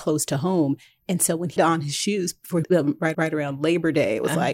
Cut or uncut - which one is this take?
cut